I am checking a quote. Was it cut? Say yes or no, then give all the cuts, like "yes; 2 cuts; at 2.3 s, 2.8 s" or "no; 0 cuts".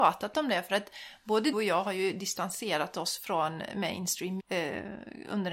yes; 2 cuts; at 1.5 s, 4.4 s